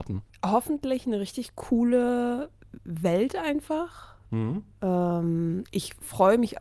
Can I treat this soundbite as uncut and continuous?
yes; 0 cuts

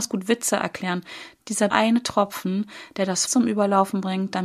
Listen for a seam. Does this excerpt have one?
yes; 2 cuts; at 1.7 s, 3.3 s

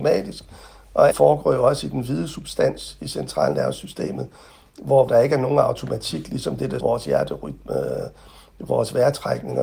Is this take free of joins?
no; 3 cuts; at 1.1 s, 5.1 s, 6.8 s

